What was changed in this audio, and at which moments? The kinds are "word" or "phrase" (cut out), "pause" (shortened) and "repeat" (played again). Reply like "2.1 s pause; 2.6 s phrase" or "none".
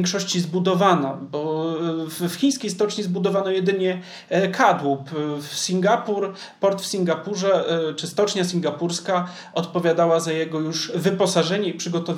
none